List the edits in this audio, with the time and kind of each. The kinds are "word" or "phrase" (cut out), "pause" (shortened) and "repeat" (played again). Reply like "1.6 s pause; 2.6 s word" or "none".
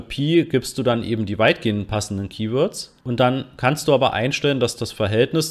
3.0 s pause